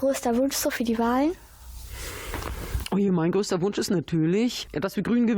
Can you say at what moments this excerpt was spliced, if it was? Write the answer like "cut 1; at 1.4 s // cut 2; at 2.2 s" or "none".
none